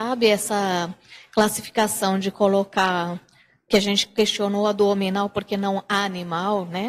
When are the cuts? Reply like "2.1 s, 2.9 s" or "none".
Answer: none